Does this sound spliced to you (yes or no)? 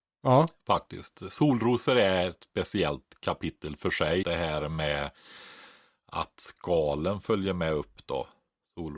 yes